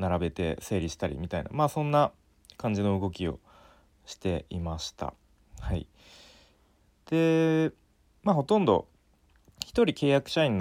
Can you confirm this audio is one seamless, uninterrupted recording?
yes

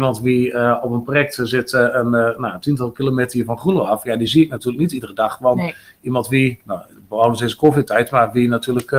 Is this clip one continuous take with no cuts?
yes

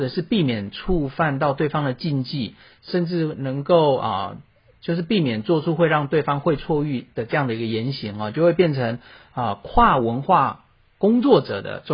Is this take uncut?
no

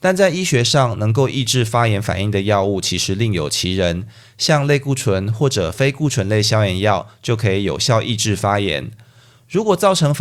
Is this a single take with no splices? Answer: yes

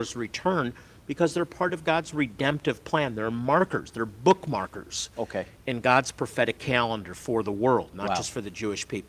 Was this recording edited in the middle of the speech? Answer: no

